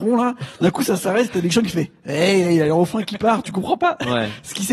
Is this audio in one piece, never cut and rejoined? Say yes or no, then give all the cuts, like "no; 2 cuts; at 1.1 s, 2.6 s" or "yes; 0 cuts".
no; 1 cut; at 2.4 s